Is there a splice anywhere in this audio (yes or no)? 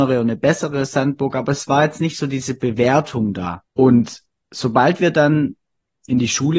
yes